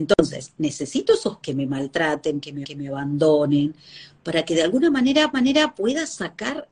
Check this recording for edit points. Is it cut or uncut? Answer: cut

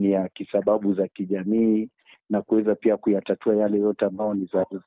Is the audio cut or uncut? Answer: uncut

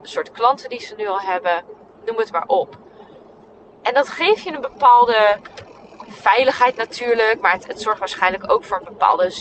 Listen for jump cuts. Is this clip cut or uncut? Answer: uncut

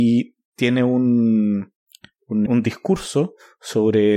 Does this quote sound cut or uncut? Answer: cut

